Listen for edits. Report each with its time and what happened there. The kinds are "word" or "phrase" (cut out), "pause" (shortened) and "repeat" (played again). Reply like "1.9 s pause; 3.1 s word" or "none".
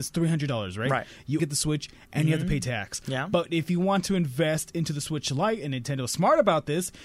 1.4 s word